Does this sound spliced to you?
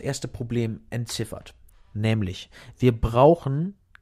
no; 0 cuts

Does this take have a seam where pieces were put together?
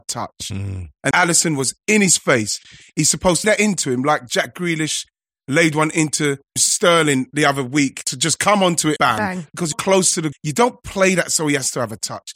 yes; 7 cuts; at 1.1 s, 3.4 s, 6.6 s, 8.0 s, 9.0 s, 9.7 s, 10.3 s

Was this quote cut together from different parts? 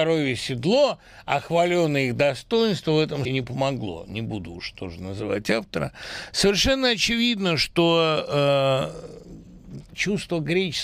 yes; 1 cut; at 3.2 s

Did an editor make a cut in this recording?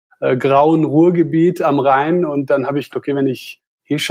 yes; 1 cut; at 2.9 s

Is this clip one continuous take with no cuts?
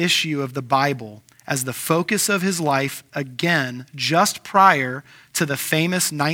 yes; 0 cuts

